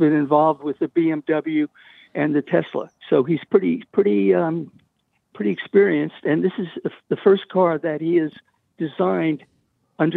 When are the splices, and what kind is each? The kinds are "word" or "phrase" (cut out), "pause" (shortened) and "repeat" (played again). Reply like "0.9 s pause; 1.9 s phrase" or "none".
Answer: 3.0 s pause